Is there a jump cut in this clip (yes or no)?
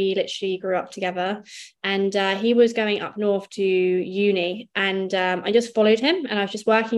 no